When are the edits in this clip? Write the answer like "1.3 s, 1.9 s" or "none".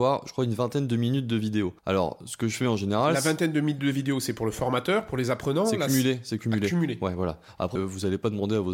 1.8 s, 7.8 s